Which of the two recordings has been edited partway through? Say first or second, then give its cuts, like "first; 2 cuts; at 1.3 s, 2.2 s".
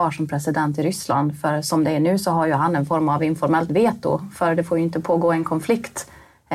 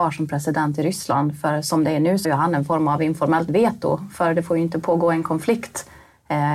second; 1 cut; at 2.2 s